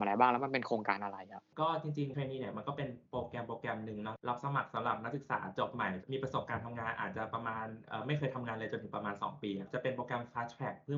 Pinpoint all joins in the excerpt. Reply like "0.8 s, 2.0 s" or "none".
2.1 s